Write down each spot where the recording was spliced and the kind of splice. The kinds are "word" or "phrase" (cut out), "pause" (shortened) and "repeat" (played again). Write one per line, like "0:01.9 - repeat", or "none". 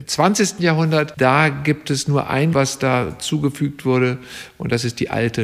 0:01.2 - word
0:02.5 - word